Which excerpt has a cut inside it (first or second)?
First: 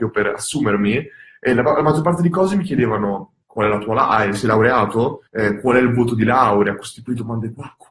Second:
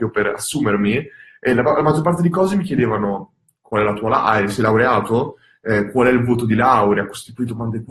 first